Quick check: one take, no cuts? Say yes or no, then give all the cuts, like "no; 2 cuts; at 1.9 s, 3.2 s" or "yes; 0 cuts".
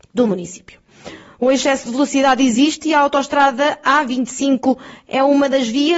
yes; 0 cuts